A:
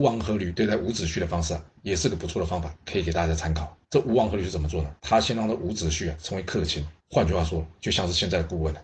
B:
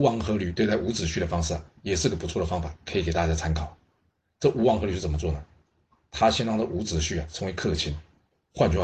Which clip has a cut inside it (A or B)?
A